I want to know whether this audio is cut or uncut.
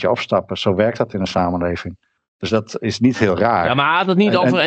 uncut